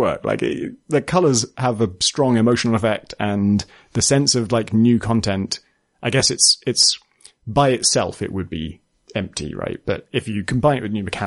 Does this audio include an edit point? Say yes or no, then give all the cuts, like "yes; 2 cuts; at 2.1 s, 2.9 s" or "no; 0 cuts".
no; 0 cuts